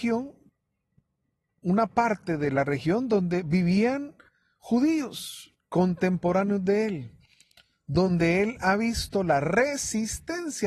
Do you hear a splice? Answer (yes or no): no